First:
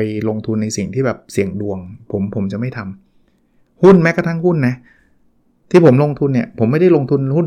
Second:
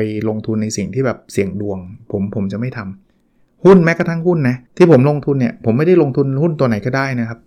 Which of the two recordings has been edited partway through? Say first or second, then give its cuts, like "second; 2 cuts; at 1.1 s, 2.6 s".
second; 2 cuts; at 3.0 s, 4.7 s